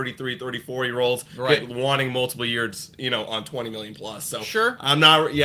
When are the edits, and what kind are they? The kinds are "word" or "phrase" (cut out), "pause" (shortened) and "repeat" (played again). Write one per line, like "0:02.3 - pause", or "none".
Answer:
none